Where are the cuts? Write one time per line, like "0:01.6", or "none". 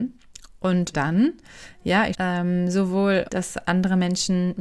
0:00.9
0:02.1
0:03.3